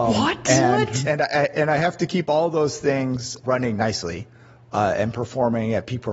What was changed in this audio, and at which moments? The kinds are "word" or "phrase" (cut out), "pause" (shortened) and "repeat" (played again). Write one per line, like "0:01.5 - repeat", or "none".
none

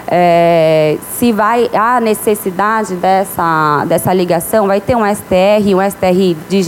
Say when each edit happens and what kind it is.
none

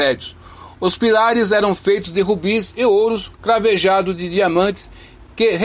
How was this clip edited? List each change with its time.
none

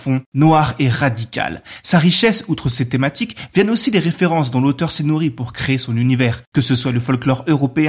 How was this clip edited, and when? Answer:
none

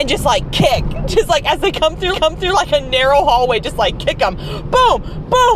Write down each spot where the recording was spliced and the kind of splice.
0:02.1 - repeat

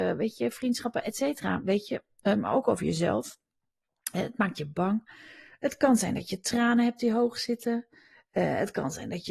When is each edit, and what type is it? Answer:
none

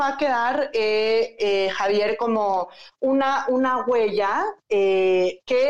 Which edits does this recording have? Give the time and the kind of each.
none

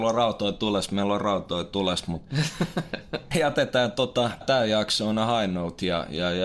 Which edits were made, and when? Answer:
0:03.3 - word
0:04.4 - word

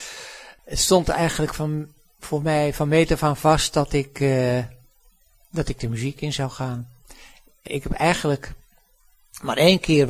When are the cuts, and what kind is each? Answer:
0:07.7 - word

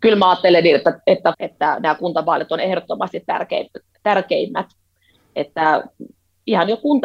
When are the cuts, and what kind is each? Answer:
0:01.3 - phrase

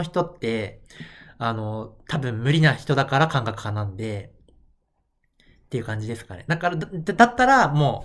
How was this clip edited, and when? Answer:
none

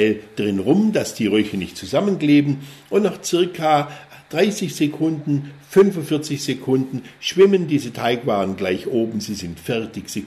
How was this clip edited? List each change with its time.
none

